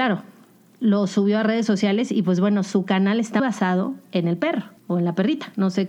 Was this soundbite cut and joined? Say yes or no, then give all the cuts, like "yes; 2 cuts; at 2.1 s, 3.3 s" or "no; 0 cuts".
yes; 2 cuts; at 3.4 s, 4.8 s